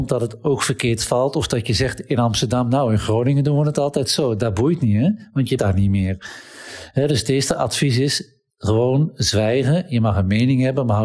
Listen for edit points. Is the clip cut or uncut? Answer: cut